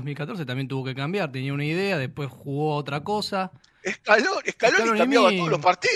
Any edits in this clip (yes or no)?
no